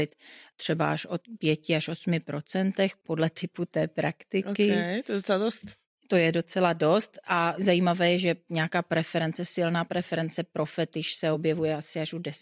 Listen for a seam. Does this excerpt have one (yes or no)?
no